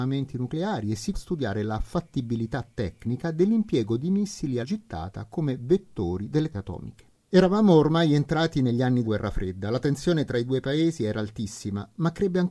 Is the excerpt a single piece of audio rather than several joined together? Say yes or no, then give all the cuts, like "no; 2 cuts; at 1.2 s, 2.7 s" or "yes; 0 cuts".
no; 4 cuts; at 1.1 s, 4.6 s, 6.5 s, 9.0 s